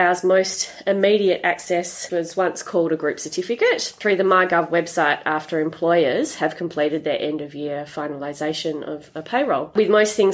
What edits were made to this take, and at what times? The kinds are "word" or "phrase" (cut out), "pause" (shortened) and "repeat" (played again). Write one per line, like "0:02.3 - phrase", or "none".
0:02.1 - phrase